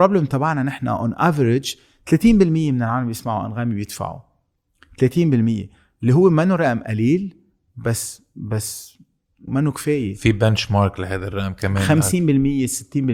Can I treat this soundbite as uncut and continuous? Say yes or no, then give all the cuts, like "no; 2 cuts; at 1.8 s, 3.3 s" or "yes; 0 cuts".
no; 1 cut; at 9.5 s